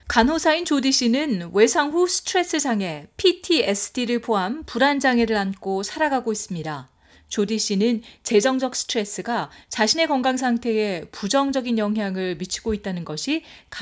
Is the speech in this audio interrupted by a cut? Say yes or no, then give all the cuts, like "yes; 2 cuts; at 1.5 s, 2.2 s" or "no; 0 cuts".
no; 0 cuts